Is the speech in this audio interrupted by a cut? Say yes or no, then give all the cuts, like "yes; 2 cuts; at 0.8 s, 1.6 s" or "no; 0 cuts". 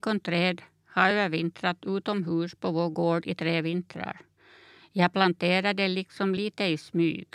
no; 0 cuts